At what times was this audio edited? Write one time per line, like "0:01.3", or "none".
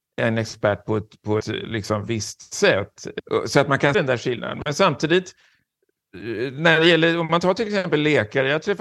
0:01.4
0:03.9